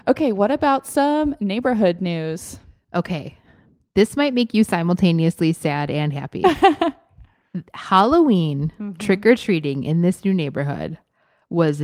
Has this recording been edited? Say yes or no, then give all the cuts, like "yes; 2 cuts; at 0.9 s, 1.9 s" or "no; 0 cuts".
no; 0 cuts